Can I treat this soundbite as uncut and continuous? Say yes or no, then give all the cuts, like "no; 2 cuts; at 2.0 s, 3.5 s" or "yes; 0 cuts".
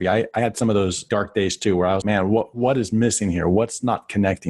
no; 2 cuts; at 1.1 s, 2.0 s